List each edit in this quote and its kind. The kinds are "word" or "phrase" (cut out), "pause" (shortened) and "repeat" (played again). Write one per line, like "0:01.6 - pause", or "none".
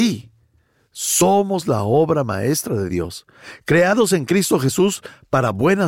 none